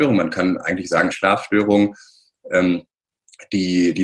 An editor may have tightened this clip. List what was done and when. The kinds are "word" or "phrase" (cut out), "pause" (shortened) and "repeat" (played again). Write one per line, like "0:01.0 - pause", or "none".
0:01.1 - phrase